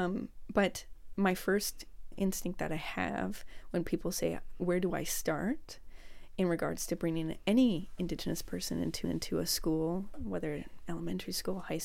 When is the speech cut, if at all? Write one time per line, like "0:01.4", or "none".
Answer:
0:02.1
0:09.0